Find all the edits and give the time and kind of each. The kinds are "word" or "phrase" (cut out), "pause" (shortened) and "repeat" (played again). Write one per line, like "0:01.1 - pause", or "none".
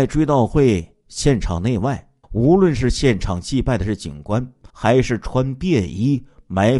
0:02.2 - pause
0:04.7 - pause